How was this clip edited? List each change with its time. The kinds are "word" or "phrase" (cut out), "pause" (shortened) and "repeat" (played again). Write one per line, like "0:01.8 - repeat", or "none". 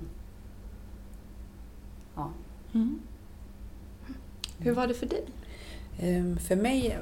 none